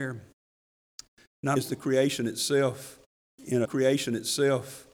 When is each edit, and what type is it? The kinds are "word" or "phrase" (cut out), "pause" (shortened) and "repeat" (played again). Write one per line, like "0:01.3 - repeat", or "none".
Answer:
0:01.6 - word
0:03.6 - repeat